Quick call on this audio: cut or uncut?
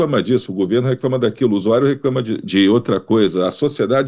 cut